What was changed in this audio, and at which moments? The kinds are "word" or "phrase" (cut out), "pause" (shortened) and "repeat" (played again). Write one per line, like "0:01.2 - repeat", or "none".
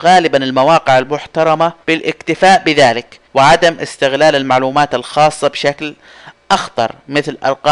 0:01.8 - pause
0:03.2 - pause